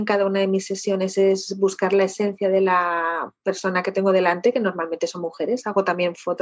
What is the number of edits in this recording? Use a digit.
0